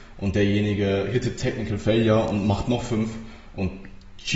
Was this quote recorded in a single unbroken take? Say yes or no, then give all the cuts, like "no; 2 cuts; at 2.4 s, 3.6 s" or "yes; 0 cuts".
yes; 0 cuts